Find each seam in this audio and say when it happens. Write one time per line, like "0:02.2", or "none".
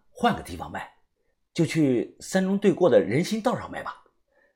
0:01.3